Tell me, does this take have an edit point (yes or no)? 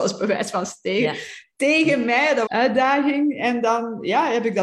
yes